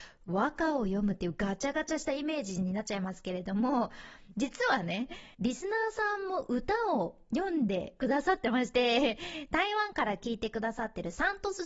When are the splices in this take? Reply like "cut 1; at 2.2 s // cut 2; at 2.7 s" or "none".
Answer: cut 1; at 5.3 s